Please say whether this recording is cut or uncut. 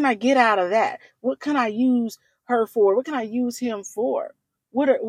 uncut